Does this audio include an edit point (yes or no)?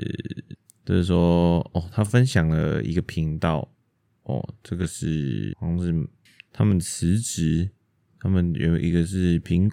no